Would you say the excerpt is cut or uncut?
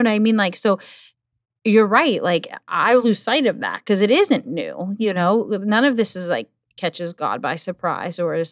uncut